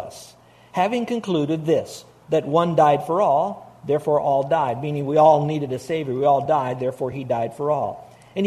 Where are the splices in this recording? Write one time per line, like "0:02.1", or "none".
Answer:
none